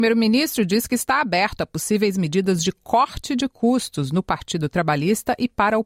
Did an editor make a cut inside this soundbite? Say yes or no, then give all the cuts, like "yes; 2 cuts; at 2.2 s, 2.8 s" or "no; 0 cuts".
no; 0 cuts